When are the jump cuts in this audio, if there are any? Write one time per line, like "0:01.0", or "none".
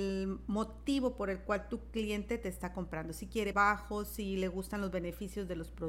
0:03.5